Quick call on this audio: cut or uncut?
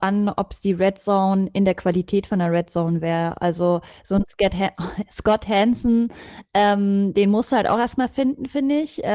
uncut